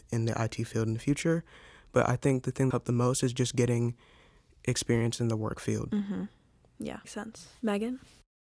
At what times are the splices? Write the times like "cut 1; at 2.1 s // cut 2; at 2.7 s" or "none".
cut 1; at 2.7 s // cut 2; at 7.0 s